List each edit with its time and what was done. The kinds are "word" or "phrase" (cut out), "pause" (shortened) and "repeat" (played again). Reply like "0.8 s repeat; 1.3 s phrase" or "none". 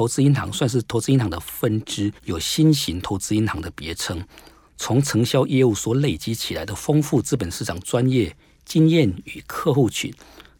2.2 s pause